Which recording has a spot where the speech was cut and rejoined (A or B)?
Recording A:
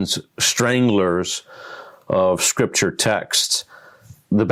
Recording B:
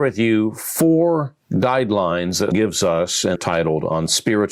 B